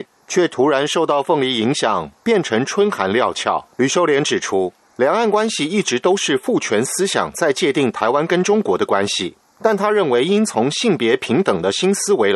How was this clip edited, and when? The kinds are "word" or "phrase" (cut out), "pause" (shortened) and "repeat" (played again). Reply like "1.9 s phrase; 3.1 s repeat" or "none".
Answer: 3.7 s pause